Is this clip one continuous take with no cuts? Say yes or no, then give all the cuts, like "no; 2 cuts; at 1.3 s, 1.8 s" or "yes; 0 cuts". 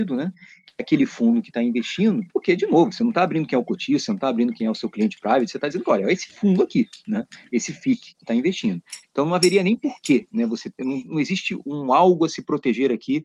no; 1 cut; at 2.3 s